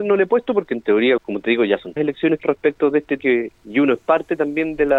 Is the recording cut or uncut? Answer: cut